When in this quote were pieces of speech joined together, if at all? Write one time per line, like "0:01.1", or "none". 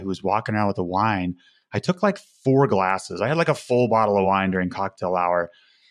none